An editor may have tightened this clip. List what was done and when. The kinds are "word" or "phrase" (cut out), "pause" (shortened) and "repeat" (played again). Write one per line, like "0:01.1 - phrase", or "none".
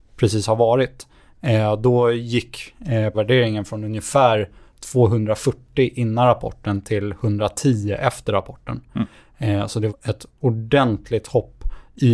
0:03.1 - word
0:09.9 - word